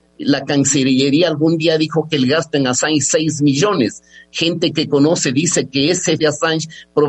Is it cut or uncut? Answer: cut